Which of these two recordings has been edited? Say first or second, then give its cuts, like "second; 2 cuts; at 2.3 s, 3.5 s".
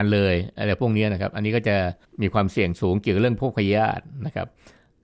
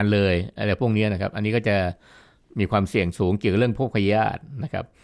first; 1 cut; at 2.0 s